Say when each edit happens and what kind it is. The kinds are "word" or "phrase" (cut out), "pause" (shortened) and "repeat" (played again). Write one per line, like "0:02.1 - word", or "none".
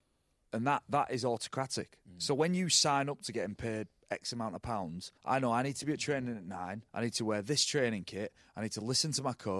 0:05.2 - pause
0:06.9 - pause